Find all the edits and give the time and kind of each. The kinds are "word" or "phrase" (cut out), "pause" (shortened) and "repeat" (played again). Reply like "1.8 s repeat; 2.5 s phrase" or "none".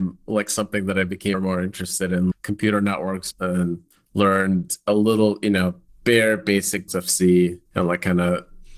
1.3 s word; 2.3 s word; 3.3 s phrase; 3.9 s pause; 5.9 s pause; 6.9 s word; 7.7 s pause